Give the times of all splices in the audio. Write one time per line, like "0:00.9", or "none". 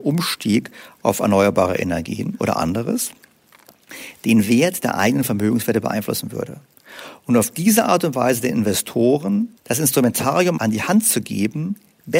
0:09.6